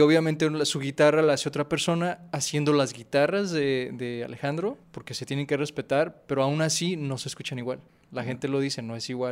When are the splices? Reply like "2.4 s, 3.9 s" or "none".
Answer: 4.8 s, 7.9 s

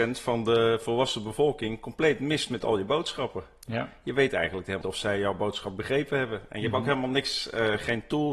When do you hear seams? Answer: 4.8 s

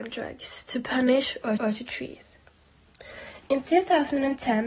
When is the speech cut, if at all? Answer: 1.6 s

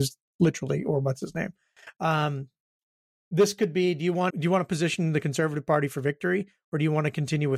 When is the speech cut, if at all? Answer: 4.3 s

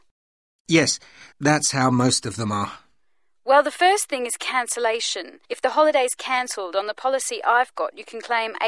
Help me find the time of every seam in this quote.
1.3 s, 5.4 s

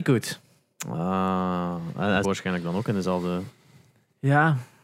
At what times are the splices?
2.2 s

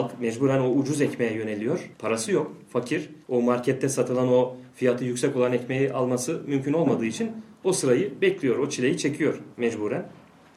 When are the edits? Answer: 1.9 s, 3.2 s, 9.5 s

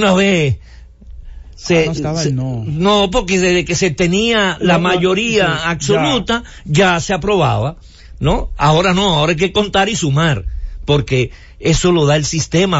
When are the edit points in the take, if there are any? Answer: 2.0 s

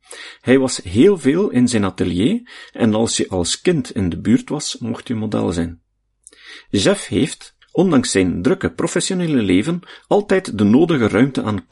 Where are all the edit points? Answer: 7.6 s

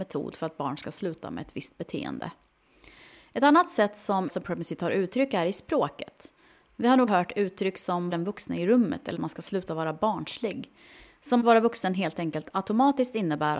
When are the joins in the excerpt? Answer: 4.3 s, 7.1 s, 8.1 s, 9.1 s, 11.4 s

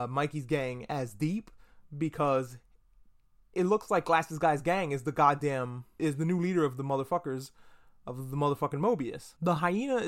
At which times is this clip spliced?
none

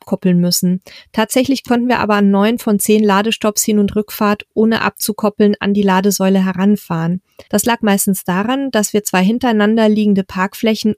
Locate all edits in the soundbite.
7.5 s

